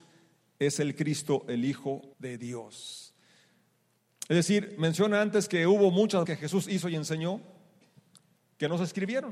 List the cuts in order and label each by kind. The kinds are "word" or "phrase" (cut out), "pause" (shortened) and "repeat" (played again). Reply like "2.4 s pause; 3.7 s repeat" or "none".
2.1 s pause; 6.2 s phrase